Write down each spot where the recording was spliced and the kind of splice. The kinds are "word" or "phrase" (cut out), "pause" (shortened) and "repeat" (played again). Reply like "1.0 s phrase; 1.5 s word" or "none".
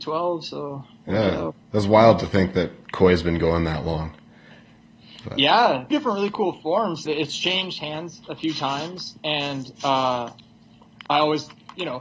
1.6 s pause; 5.9 s word; 7.1 s word; 11.1 s pause